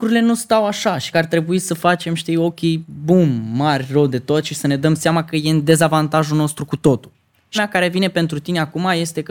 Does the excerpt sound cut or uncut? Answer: cut